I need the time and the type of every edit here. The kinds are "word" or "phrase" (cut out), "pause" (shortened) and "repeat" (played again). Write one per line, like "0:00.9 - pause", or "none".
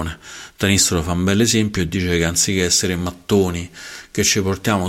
none